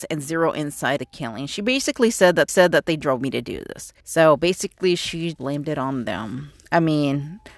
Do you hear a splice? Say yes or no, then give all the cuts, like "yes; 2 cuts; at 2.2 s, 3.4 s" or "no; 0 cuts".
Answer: yes; 4 cuts; at 1.0 s, 2.5 s, 4.0 s, 5.4 s